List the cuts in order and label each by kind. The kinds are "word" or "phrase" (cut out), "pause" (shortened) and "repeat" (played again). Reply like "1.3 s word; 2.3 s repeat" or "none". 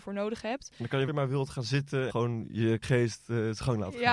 1.1 s word; 2.1 s word; 2.8 s word